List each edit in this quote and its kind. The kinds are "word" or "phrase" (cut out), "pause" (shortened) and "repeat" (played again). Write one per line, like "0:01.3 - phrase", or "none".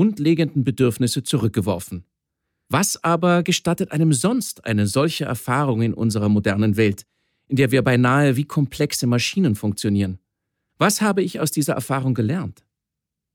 none